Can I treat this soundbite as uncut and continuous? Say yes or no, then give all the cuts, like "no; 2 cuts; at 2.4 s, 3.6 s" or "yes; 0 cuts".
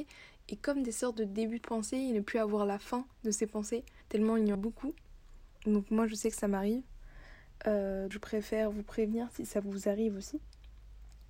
no; 4 cuts; at 3.1 s, 4.0 s, 4.5 s, 8.1 s